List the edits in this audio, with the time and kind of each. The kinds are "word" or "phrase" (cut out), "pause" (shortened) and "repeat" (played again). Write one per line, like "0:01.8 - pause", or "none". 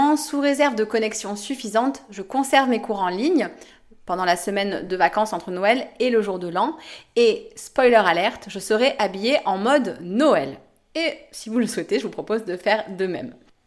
none